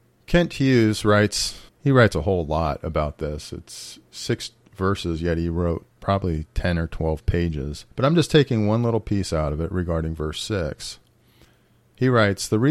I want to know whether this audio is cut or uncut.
cut